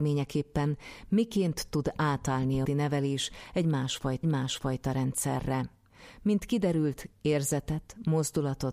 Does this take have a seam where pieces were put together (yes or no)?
yes